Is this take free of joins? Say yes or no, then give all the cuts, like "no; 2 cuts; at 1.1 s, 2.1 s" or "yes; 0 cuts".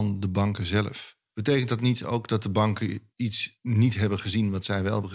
no; 1 cut; at 3.1 s